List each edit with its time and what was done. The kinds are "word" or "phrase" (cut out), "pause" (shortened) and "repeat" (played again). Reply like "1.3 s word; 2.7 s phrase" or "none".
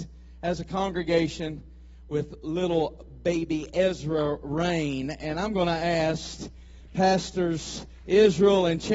none